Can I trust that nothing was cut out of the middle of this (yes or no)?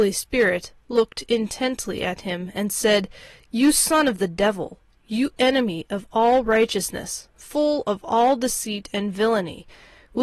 yes